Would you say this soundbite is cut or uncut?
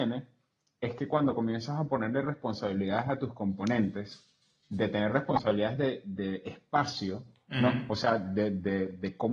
uncut